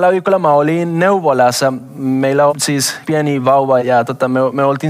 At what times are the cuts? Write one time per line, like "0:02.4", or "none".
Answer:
0:02.5
0:03.0
0:03.8